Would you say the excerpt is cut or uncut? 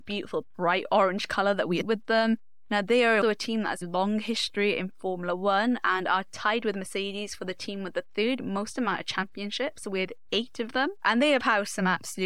cut